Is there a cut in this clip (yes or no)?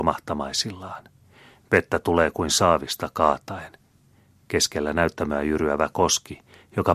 no